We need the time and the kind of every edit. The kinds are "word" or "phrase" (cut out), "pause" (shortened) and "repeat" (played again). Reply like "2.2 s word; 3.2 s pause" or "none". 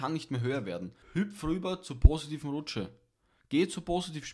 1.0 s pause